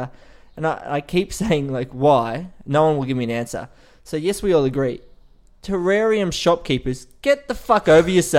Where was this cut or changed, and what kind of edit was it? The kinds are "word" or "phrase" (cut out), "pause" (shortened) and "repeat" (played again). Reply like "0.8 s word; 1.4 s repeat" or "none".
none